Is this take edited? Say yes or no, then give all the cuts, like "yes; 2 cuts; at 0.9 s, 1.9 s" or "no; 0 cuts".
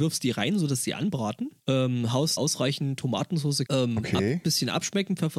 yes; 3 cuts; at 1.6 s, 2.4 s, 3.7 s